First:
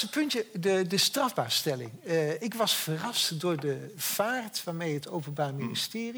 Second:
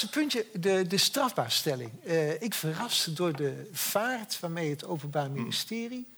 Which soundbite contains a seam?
second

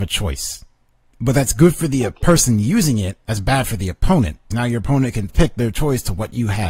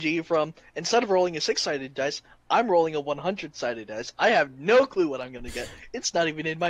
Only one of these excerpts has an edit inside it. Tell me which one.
first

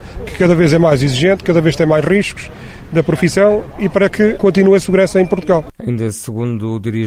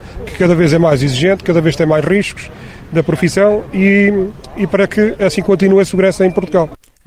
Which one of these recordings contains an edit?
first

